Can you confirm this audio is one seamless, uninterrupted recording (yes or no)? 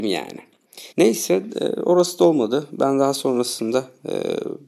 no